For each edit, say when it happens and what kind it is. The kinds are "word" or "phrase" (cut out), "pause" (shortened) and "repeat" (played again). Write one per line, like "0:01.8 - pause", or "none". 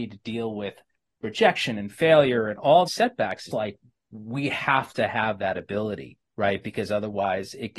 0:02.9 - word
0:03.5 - word